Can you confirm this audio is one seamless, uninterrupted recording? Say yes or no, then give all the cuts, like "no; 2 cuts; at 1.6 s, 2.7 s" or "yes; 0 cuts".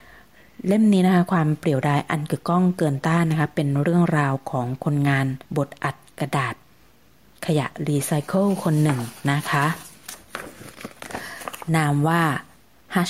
no; 1 cut; at 5.4 s